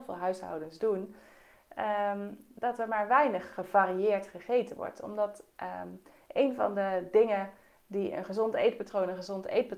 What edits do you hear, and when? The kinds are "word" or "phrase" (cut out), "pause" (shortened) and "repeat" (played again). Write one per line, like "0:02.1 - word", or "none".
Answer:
none